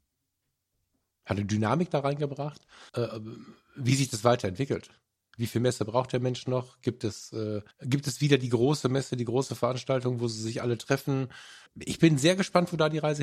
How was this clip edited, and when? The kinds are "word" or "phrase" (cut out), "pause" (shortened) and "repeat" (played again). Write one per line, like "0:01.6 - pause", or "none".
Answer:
0:02.9 - pause
0:07.7 - pause
0:11.7 - pause